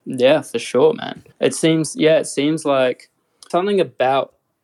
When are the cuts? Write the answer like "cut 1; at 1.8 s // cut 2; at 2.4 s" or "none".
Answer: cut 1; at 1.3 s // cut 2; at 3.5 s